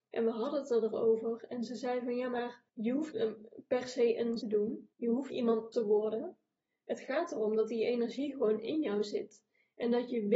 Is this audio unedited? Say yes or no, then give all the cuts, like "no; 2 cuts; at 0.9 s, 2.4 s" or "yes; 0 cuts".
no; 6 cuts; at 2.7 s, 3.1 s, 4.4 s, 4.9 s, 5.3 s, 5.7 s